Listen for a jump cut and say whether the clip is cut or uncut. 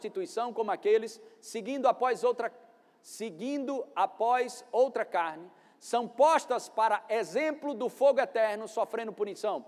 uncut